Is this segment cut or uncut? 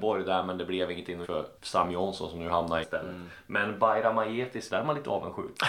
cut